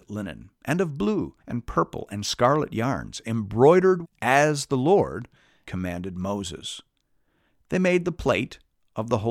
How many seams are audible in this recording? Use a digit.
3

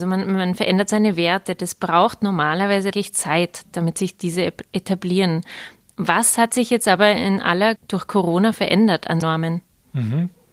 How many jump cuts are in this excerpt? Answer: 3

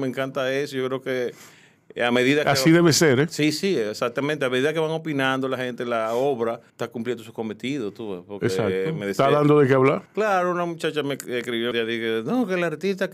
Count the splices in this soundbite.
3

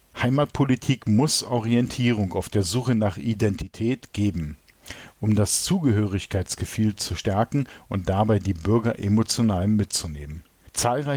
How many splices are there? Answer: 0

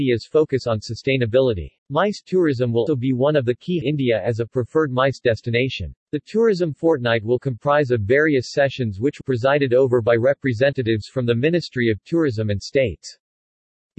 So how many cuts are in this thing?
5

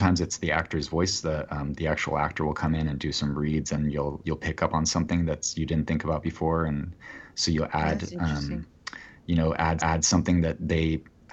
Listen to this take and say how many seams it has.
2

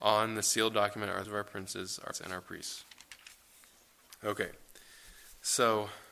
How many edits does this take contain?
2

